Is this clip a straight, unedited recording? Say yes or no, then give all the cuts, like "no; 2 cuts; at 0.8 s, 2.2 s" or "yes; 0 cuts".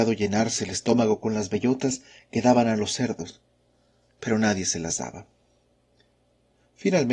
yes; 0 cuts